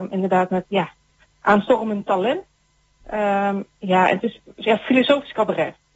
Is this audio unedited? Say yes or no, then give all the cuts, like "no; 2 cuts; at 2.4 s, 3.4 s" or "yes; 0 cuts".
yes; 0 cuts